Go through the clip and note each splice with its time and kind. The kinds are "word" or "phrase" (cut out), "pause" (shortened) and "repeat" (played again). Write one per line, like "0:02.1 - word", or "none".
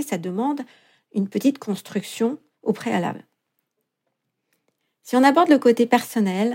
none